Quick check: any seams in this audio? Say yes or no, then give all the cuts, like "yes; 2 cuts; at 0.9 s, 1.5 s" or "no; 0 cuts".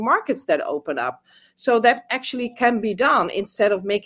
no; 0 cuts